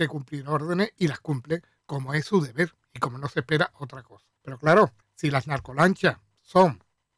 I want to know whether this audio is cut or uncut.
cut